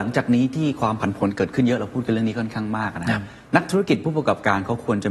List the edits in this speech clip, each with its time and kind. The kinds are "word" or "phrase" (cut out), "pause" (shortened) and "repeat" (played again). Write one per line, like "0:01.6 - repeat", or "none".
0:03.4 - pause